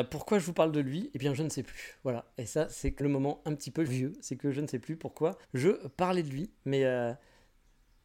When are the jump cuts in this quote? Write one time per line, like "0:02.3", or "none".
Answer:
0:03.0
0:03.9
0:05.4